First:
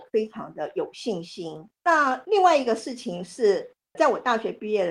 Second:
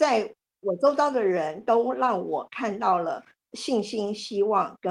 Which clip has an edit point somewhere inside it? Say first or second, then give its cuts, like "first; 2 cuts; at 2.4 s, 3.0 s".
first; 1 cut; at 1.8 s